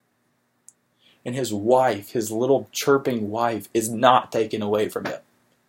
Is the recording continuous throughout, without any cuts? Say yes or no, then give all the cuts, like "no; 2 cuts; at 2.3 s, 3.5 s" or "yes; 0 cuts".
yes; 0 cuts